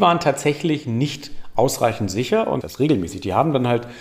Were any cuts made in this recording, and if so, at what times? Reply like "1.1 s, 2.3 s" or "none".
2.6 s